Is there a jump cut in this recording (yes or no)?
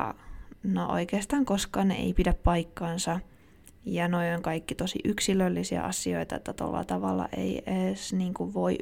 no